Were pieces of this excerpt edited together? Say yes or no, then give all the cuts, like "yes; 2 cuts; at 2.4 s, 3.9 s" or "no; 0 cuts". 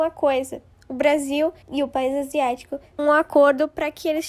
yes; 2 cuts; at 1.6 s, 3.0 s